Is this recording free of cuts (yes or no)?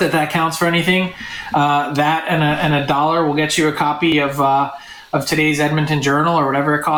yes